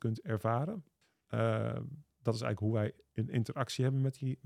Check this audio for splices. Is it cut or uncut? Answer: cut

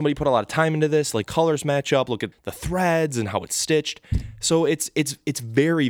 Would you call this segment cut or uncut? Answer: cut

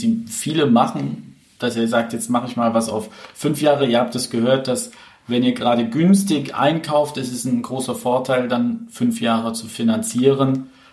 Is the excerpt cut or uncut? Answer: uncut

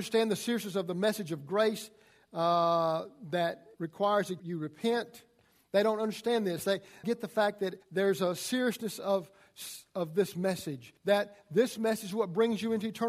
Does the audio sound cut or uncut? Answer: cut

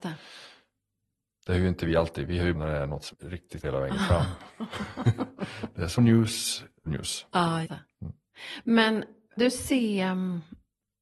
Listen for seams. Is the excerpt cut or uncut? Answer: cut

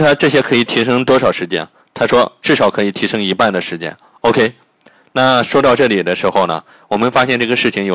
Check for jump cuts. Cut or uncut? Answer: uncut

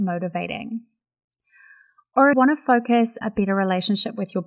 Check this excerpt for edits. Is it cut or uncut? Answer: cut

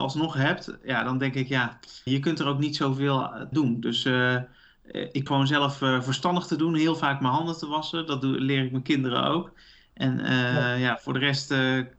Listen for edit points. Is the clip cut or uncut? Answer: cut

